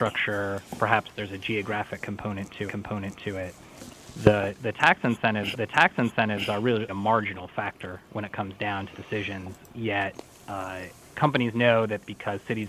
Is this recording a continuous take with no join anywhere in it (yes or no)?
no